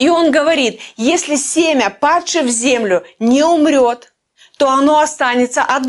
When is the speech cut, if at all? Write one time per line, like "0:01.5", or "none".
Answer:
none